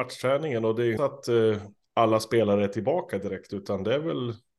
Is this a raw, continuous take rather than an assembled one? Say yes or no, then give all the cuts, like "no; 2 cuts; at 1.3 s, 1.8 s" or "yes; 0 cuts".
no; 1 cut; at 1.0 s